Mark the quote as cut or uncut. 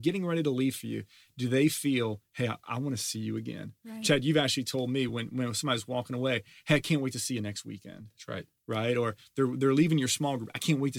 uncut